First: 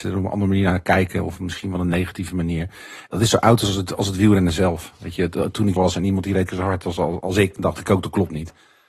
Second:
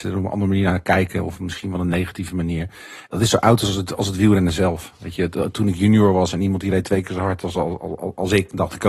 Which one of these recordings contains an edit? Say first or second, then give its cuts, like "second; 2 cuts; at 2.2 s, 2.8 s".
first; 3 cuts; at 5.8 s, 6.5 s, 7.2 s